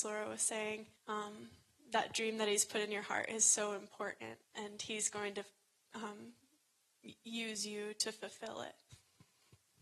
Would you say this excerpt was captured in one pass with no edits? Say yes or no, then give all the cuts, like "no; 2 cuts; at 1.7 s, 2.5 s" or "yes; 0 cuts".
no; 2 cuts; at 1.0 s, 4.4 s